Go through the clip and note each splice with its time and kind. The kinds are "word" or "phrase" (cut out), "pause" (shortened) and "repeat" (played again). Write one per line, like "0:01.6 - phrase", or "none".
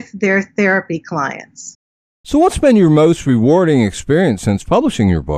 none